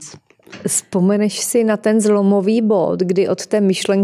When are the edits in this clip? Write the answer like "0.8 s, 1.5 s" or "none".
none